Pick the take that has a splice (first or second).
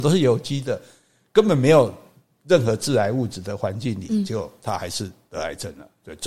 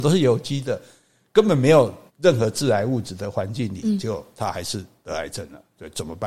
second